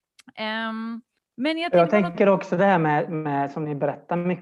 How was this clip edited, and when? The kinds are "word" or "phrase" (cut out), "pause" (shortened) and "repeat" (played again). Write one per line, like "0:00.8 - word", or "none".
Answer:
0:01.2 - pause